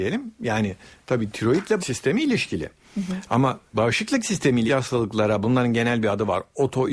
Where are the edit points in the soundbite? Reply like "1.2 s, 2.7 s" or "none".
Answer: 1.8 s, 3.7 s, 4.7 s, 5.4 s